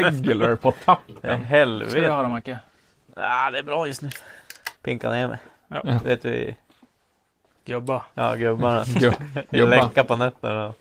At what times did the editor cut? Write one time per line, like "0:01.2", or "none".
0:04.8